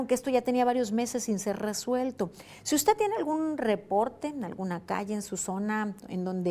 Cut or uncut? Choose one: uncut